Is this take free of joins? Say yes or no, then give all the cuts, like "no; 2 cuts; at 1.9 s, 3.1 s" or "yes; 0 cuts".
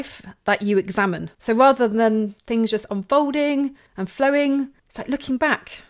no; 4 cuts; at 1.3 s, 2.4 s, 3.9 s, 4.8 s